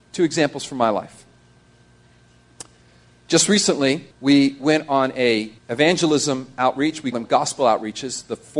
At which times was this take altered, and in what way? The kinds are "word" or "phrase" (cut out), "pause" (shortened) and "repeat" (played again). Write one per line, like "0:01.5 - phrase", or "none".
0:04.1 - pause
0:05.6 - pause
0:07.1 - word